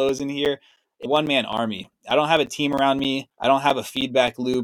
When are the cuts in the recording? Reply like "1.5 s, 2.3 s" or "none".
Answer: 1.1 s, 3.3 s